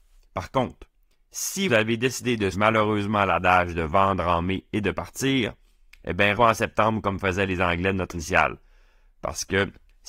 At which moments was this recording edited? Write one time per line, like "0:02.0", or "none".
0:01.7
0:02.5
0:06.3
0:08.1